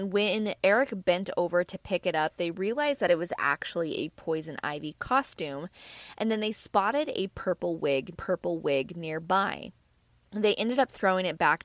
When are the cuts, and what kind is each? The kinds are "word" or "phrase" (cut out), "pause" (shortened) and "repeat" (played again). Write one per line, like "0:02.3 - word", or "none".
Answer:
0:08.1 - repeat